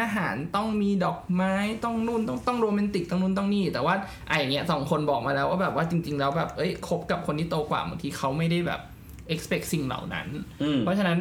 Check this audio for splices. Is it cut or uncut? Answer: uncut